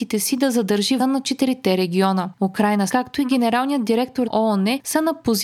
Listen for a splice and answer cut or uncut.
cut